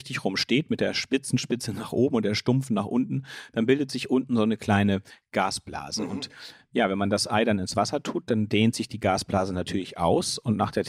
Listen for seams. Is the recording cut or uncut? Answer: uncut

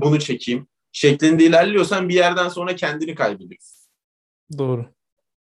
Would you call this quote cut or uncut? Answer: uncut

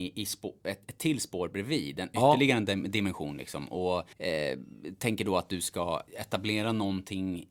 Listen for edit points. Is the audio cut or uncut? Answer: cut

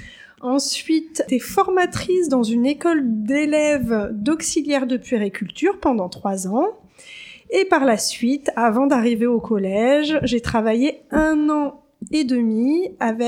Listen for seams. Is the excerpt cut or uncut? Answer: uncut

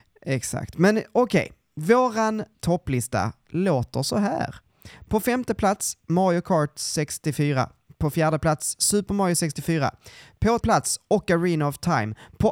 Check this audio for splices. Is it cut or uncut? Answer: cut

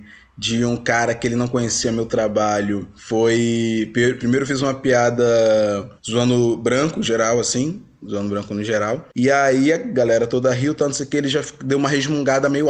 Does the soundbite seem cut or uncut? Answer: cut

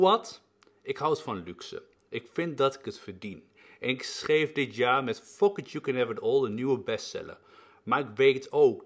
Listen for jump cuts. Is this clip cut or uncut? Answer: uncut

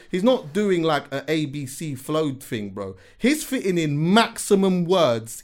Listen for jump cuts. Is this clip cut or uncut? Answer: uncut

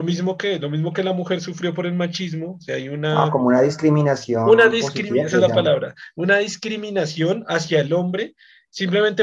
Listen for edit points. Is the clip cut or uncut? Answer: uncut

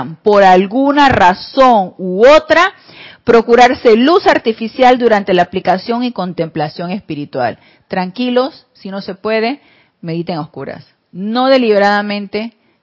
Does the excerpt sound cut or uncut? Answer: uncut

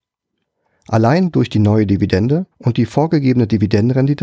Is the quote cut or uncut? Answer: cut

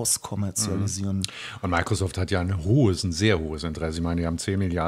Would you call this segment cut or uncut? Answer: uncut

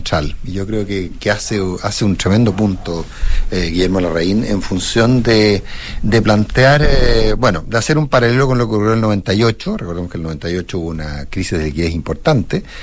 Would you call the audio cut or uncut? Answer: uncut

